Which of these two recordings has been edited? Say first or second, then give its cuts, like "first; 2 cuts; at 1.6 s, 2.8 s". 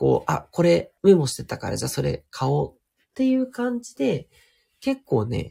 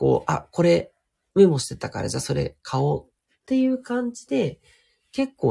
first; 1 cut; at 1.0 s